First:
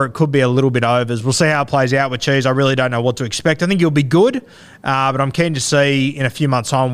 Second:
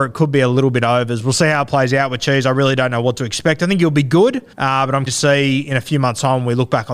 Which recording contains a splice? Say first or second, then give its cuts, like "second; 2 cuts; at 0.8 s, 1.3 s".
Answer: second; 2 cuts; at 4.5 s, 5.1 s